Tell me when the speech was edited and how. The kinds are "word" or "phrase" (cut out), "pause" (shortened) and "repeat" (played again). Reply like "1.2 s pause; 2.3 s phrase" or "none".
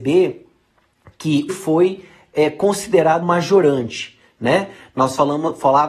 1.5 s phrase; 3.2 s word